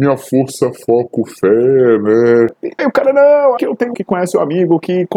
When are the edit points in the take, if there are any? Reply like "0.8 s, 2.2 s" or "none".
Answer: 2.8 s, 3.6 s, 3.9 s